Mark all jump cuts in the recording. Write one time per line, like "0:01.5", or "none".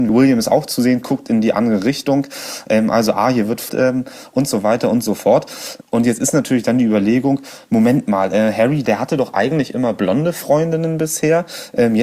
0:03.7